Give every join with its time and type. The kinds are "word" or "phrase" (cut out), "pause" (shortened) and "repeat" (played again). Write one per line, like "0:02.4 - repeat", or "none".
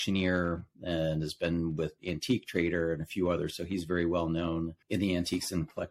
0:04.8 - pause